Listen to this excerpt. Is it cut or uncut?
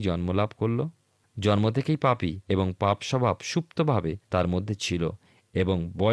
cut